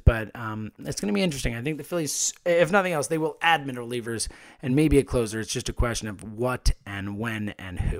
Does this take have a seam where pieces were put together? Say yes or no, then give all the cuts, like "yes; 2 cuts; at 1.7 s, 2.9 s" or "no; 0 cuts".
no; 0 cuts